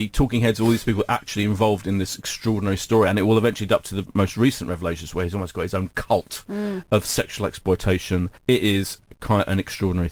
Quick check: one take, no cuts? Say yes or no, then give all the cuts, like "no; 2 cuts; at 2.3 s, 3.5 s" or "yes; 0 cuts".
no; 1 cut; at 8.4 s